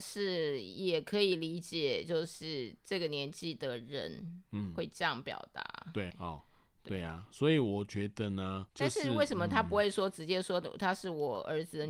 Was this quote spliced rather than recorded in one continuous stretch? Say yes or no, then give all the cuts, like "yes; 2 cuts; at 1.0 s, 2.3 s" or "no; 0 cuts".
yes; 2 cuts; at 6.1 s, 8.7 s